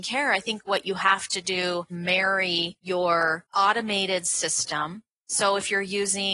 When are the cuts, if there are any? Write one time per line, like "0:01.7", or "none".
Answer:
0:01.9